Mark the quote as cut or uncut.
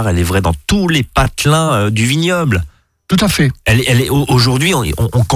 uncut